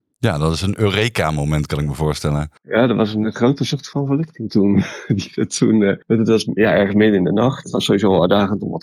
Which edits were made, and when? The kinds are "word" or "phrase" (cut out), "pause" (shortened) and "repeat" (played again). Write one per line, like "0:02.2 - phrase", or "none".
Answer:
0:02.6 - pause
0:06.0 - pause